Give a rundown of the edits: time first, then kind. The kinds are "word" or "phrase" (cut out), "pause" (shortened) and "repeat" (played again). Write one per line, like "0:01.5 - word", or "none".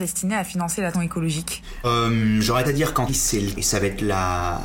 0:00.9 - word
0:01.8 - word
0:02.6 - word
0:03.1 - word
0:03.5 - word